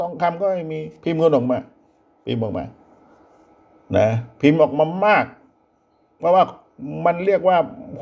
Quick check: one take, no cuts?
yes; 0 cuts

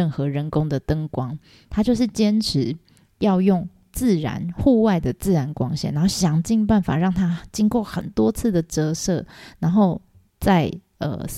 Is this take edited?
no; 0 cuts

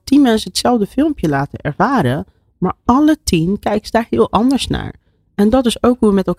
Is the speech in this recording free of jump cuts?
yes; 0 cuts

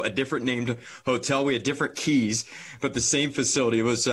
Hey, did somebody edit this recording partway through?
no; 0 cuts

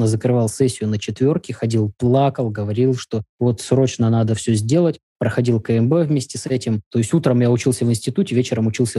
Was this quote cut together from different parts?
yes; 2 cuts; at 3.3 s, 6.8 s

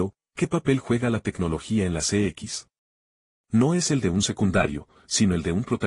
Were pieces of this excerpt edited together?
no; 0 cuts

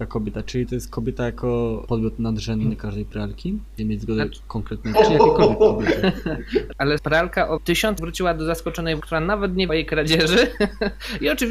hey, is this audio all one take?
no; 8 cuts; at 1.9 s, 3.8 s, 4.9 s, 7.0 s, 7.6 s, 8.0 s, 9.0 s, 9.7 s

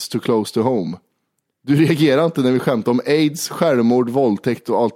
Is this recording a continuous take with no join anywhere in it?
yes; 0 cuts

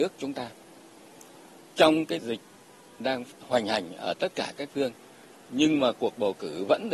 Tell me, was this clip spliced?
yes; 3 cuts; at 2.2 s, 3.3 s, 4.7 s

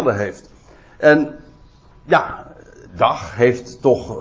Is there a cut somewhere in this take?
yes; 1 cut; at 2.9 s

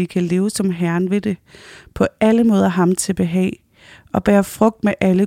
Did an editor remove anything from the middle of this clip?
no; 0 cuts

